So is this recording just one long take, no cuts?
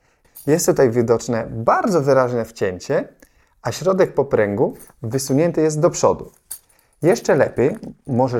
yes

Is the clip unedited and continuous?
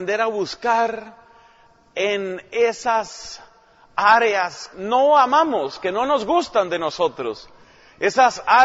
no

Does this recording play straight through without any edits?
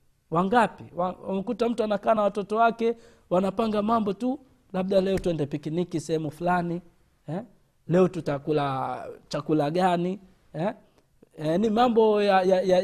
yes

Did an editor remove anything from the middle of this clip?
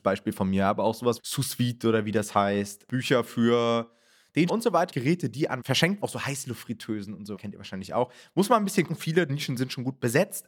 yes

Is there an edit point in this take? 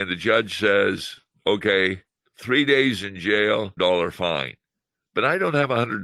yes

